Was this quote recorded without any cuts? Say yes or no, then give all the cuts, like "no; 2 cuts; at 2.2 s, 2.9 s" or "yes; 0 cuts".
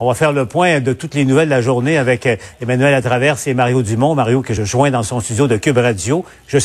yes; 0 cuts